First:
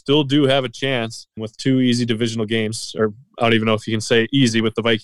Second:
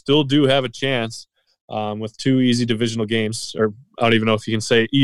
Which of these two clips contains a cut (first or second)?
first